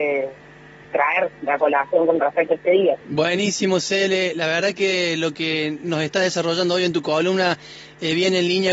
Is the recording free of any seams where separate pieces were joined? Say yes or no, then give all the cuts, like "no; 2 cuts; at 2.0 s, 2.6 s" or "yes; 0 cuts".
no; 1 cut; at 3.0 s